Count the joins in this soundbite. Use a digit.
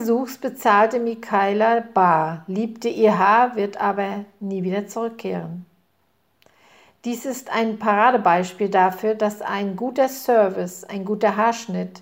0